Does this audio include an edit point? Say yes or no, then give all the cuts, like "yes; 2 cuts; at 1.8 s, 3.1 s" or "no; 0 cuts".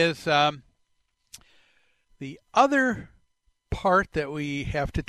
no; 0 cuts